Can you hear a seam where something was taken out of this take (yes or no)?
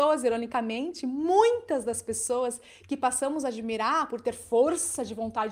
no